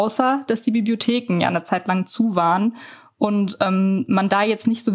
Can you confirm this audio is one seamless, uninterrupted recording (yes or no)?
yes